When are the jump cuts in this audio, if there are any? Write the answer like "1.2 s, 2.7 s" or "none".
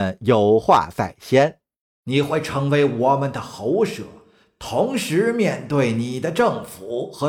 1.8 s